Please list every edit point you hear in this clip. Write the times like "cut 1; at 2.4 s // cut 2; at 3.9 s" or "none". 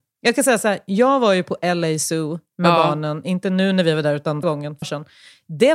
cut 1; at 4.4 s // cut 2; at 4.8 s